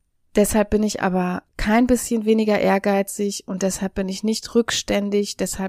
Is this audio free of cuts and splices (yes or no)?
no